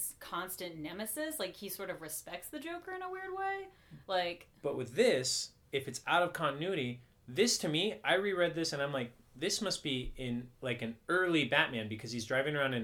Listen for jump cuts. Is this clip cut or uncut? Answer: cut